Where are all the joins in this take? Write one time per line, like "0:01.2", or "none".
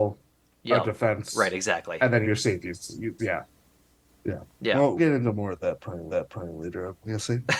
0:02.2
0:03.2
0:05.0
0:06.1